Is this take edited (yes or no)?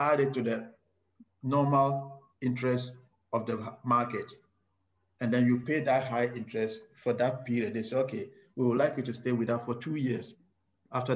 no